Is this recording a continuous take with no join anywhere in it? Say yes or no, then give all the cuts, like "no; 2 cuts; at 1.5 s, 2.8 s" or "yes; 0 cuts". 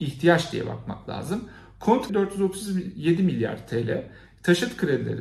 no; 1 cut; at 2.1 s